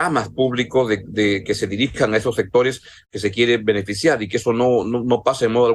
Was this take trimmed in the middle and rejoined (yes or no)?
no